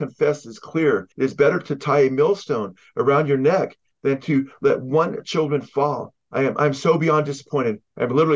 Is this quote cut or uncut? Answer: cut